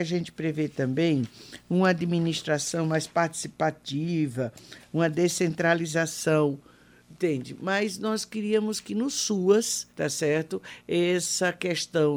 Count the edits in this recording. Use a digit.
1